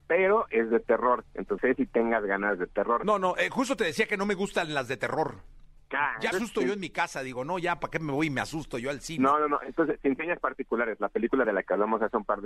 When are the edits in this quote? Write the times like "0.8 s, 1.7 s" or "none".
1.6 s, 6.3 s, 11.4 s

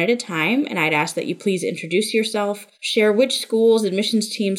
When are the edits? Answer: 2.7 s

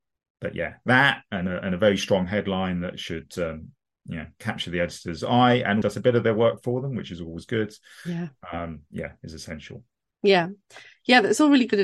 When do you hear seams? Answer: 5.8 s

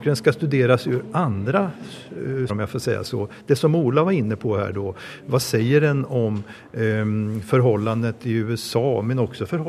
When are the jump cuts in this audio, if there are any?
2.5 s

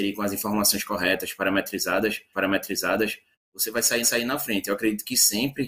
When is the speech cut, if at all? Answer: 2.3 s, 4.0 s

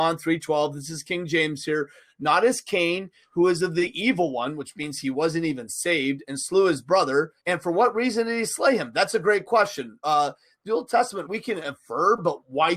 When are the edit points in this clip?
7.4 s, 11.3 s

